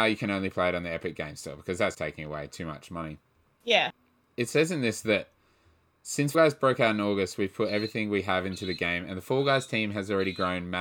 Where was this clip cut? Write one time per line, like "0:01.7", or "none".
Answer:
0:01.9
0:04.3
0:06.3